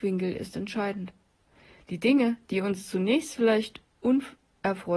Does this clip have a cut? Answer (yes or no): no